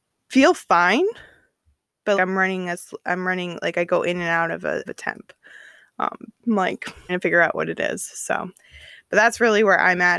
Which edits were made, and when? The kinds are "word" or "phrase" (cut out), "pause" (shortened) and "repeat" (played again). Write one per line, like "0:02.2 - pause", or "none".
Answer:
0:02.1 - word
0:04.9 - word
0:06.3 - word
0:07.1 - word